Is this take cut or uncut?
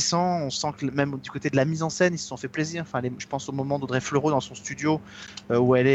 uncut